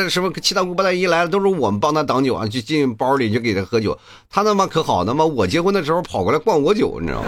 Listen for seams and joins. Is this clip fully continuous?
yes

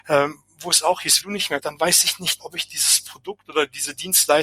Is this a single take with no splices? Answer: no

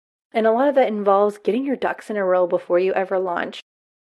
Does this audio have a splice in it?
no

